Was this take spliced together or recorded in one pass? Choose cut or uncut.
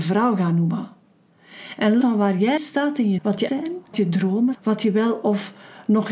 cut